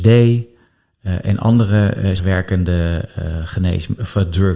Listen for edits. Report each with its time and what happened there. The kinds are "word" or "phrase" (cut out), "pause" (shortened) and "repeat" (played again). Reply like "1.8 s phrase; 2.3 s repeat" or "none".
2.2 s word